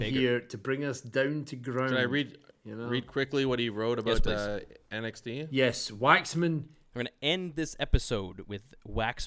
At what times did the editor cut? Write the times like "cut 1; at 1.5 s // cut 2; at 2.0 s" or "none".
none